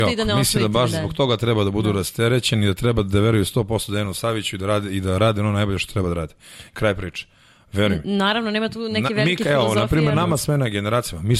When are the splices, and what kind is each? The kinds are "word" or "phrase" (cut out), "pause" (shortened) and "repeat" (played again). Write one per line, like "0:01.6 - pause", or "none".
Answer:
none